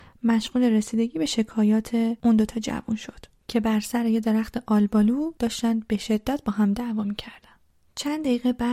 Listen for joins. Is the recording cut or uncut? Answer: uncut